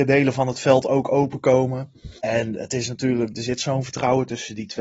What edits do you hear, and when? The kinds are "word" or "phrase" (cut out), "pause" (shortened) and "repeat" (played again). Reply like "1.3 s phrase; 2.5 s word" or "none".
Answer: 2.2 s pause